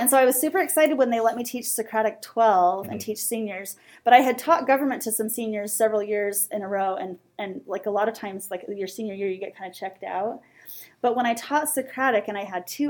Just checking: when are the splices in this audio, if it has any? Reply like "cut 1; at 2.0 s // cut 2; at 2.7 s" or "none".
none